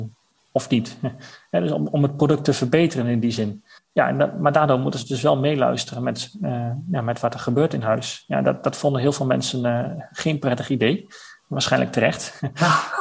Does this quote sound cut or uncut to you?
cut